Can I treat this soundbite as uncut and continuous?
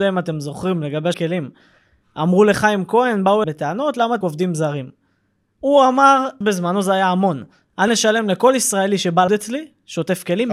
no; 6 cuts; at 1.1 s, 3.4 s, 4.2 s, 6.4 s, 7.9 s, 9.3 s

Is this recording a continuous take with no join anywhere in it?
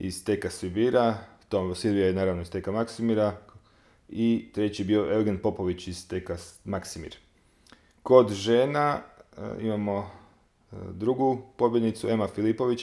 yes; 0 cuts

